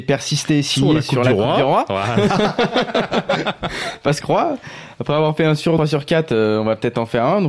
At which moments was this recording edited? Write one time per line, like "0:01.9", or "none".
0:04.2
0:05.8